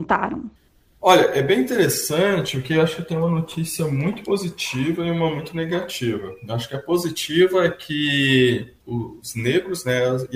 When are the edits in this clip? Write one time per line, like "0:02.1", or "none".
0:08.8

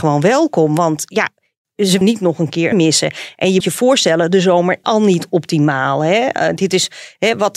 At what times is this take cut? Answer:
0:02.0
0:02.7
0:03.6
0:04.8

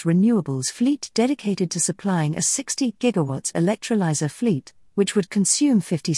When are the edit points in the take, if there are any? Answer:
none

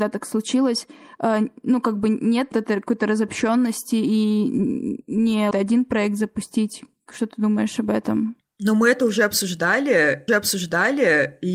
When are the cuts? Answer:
0:02.5
0:05.5
0:10.3

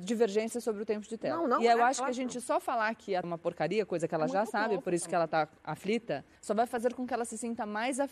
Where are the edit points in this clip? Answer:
0:03.2
0:06.4

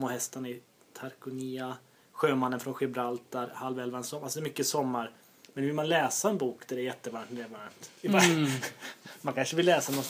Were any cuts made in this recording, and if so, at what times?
0:08.0

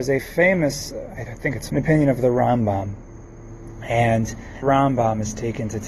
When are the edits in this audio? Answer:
0:01.3
0:01.7
0:04.6

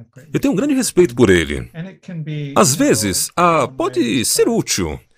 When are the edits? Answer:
0:03.7

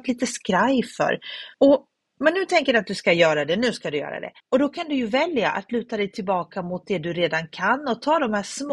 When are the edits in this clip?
0:01.5
0:04.4

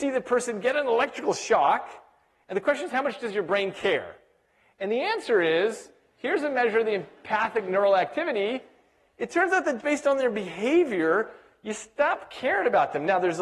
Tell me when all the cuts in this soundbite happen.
0:09.8

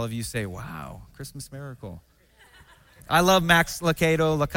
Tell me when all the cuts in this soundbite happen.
none

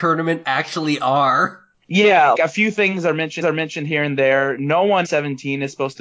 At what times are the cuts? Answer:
0:02.3
0:03.4
0:05.0

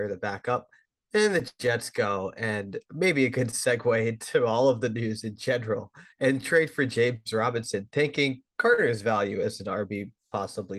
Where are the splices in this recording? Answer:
0:06.1
0:08.5

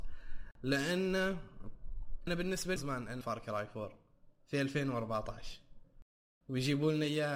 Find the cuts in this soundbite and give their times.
0:02.3
0:02.8
0:03.2
0:06.2

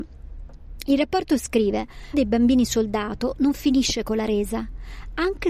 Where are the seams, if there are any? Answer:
0:02.1

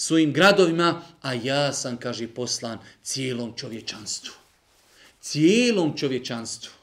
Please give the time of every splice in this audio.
none

